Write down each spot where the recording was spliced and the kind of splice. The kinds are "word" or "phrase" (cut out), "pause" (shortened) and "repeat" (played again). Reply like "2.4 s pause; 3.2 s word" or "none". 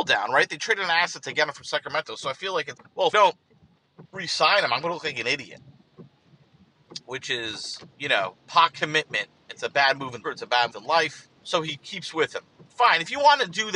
2.8 s word; 3.1 s word; 4.1 s pause; 7.9 s pause; 10.2 s word; 10.7 s word; 11.4 s pause

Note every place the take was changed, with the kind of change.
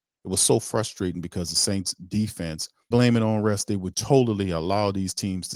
2.9 s word; 3.9 s word

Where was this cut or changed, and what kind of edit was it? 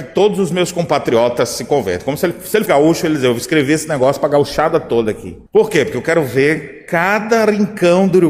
2.7 s word; 5.5 s pause

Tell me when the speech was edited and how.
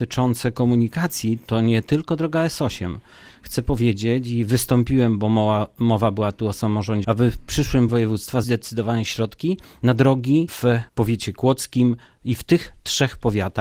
7.0 s word; 7.9 s word; 8.4 s word

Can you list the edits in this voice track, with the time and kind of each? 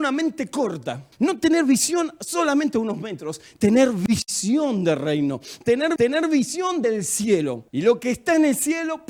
1.1 s pause; 6.0 s repeat; 7.7 s pause

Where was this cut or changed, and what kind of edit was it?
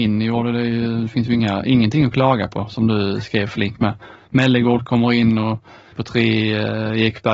5.9 s word

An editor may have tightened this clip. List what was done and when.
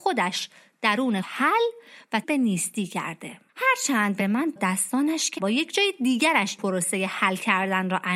1.2 s word; 2.2 s word; 3.5 s pause; 4.2 s word; 4.6 s word; 5.4 s word; 6.6 s word

